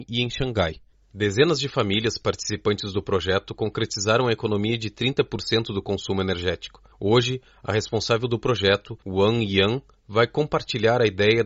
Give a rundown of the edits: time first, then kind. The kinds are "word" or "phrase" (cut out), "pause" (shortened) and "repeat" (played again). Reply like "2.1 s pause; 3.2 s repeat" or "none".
6.9 s pause; 9.0 s pause